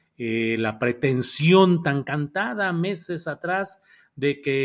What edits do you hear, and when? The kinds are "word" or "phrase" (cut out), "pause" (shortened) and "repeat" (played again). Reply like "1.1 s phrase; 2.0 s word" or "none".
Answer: none